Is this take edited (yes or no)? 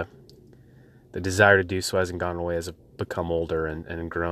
yes